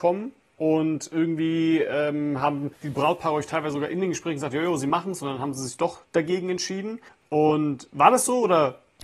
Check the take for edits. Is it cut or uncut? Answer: cut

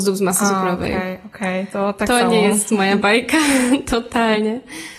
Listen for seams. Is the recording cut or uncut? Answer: uncut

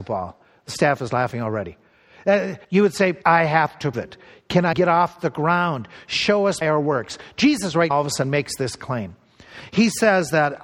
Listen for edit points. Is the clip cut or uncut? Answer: cut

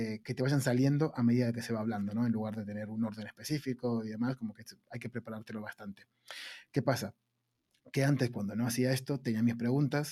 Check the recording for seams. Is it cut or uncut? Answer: uncut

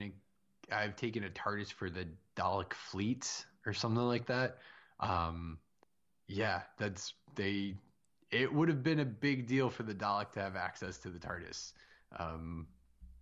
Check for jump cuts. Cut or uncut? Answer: cut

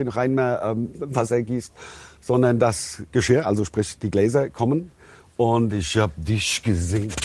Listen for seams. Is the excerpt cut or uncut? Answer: cut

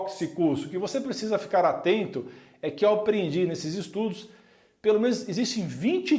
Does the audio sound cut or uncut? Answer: uncut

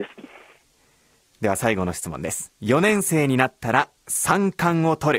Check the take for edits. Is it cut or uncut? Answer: cut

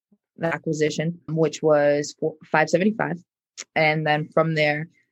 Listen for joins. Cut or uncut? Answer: cut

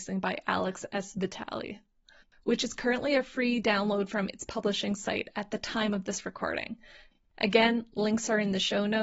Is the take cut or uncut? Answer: uncut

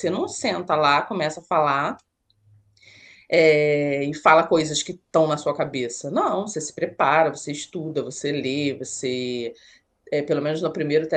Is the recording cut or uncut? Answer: uncut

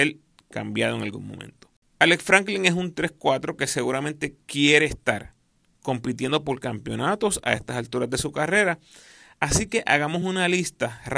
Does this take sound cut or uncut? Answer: uncut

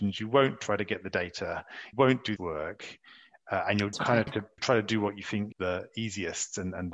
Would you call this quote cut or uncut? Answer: cut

